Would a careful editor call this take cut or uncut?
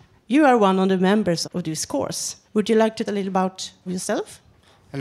cut